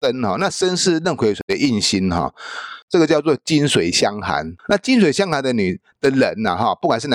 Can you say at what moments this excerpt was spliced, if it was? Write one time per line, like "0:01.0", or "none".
0:04.6